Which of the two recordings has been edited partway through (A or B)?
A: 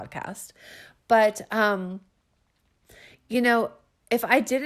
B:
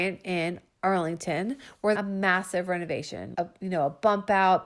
B